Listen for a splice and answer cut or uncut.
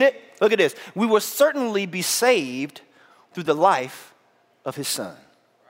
uncut